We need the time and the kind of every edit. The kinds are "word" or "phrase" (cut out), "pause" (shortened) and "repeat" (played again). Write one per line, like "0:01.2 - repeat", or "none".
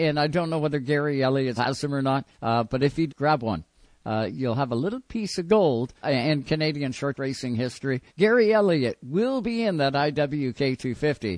0:01.6 - word
0:02.3 - pause
0:03.1 - word
0:06.0 - word
0:07.1 - word
0:08.1 - pause